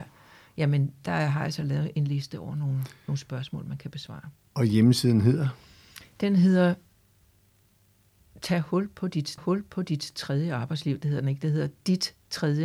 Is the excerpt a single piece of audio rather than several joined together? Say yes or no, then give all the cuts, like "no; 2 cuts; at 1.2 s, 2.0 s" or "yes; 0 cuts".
no; 1 cut; at 9.4 s